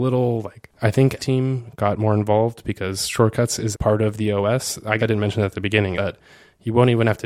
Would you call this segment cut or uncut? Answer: cut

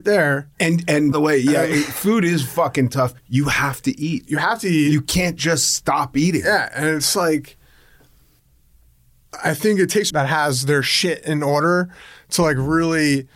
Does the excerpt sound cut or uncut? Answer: cut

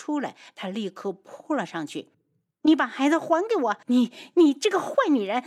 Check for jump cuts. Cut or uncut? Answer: cut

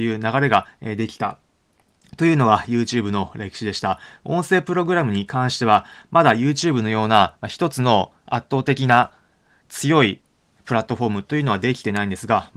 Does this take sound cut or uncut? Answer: uncut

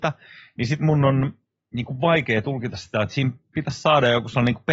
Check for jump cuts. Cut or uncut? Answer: uncut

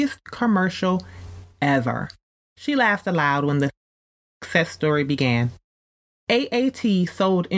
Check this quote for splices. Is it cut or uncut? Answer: uncut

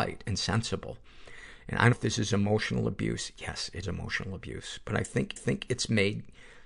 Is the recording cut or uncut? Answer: cut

